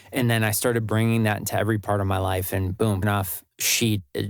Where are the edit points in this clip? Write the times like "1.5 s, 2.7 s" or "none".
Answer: 3.0 s